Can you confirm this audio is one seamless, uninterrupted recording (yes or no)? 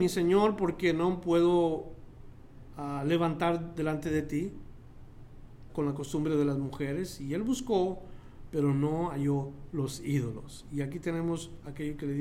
no